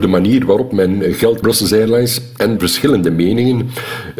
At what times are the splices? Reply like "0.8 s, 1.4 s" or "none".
1.4 s, 2.6 s

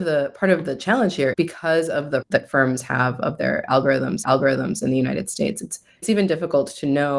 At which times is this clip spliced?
1.3 s, 2.2 s, 4.2 s, 6.0 s

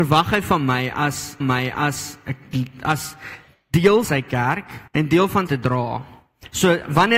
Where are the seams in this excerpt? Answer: 1.4 s, 4.0 s, 4.9 s, 5.5 s

